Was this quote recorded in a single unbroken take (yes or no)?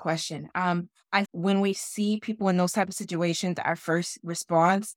no